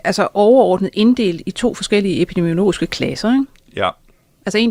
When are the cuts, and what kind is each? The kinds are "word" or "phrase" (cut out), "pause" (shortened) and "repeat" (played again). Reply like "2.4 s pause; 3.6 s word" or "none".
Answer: none